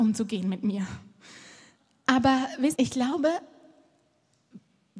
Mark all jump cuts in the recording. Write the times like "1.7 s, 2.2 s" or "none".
2.8 s